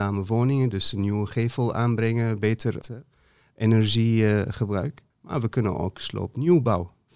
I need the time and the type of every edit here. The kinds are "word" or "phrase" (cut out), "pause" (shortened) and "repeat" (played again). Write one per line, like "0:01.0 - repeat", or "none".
0:02.8 - phrase
0:05.1 - pause